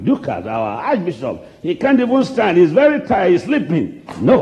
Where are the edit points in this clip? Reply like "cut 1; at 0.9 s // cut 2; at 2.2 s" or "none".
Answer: none